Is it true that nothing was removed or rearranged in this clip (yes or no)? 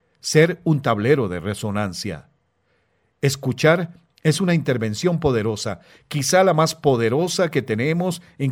yes